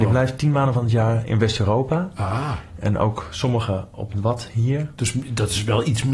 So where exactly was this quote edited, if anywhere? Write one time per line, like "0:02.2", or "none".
none